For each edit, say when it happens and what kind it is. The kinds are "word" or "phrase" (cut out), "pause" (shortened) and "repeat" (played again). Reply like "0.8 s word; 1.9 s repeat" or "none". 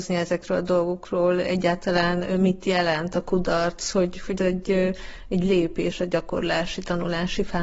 4.4 s word